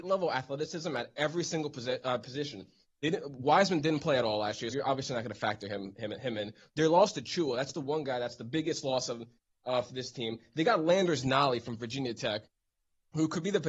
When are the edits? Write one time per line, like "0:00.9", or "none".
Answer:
0:04.7